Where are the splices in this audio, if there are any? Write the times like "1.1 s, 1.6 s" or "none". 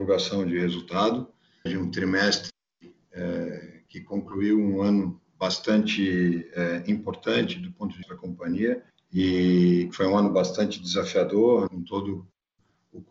1.7 s, 8.0 s, 8.9 s, 11.7 s